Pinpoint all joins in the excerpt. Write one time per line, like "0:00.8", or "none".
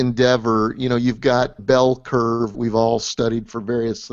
0:01.6
0:02.5

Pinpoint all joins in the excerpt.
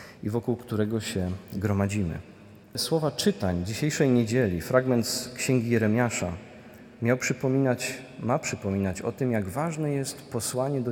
0:02.6

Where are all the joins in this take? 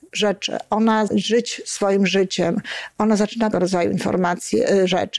0:01.1
0:03.5

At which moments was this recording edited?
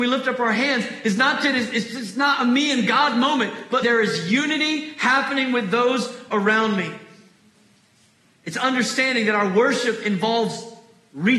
0:03.8

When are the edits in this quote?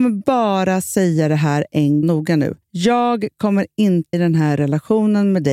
0:02.0
0:02.6
0:04.1

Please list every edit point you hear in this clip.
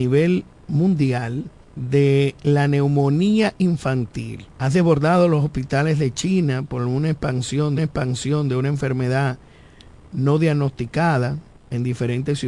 0:01.6
0:04.5
0:07.8
0:10.0
0:11.5

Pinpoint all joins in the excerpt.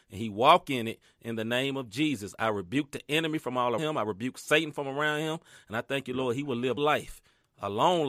0:03.8
0:06.8

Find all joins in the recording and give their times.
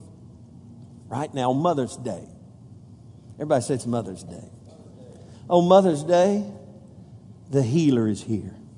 none

